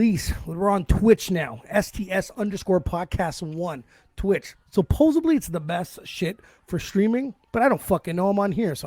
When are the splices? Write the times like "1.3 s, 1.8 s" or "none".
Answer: none